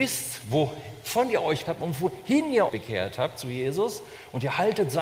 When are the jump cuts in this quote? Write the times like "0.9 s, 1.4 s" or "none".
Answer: 1.7 s, 2.7 s